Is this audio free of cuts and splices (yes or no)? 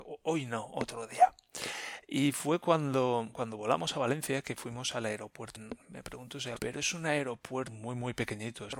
no